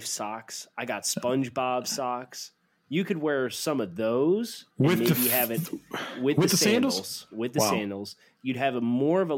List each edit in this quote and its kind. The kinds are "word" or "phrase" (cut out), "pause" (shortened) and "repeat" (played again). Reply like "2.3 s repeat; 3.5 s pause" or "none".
4.7 s pause